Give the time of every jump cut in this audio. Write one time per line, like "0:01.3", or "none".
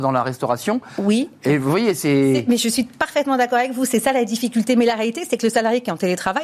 none